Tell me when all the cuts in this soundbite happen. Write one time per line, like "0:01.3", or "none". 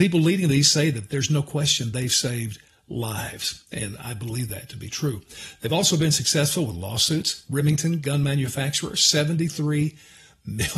none